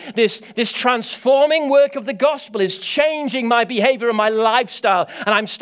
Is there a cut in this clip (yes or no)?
no